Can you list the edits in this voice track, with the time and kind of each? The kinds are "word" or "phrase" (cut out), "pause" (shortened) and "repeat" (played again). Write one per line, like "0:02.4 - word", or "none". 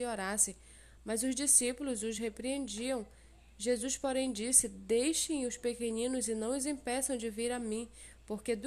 none